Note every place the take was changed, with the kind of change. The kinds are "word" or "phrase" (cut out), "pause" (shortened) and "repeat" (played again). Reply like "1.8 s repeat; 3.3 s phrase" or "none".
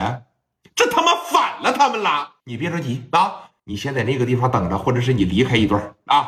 2.4 s pause; 3.6 s pause